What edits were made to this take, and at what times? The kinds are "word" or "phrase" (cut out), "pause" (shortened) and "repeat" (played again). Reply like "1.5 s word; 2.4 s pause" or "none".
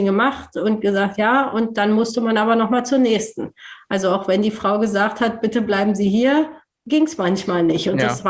6.7 s pause